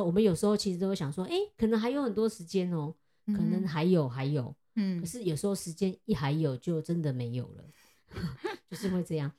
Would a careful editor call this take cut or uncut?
uncut